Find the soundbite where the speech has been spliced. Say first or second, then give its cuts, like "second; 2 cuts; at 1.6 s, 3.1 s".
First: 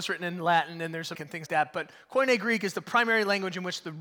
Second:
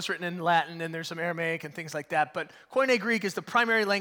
first; 2 cuts; at 1.1 s, 1.5 s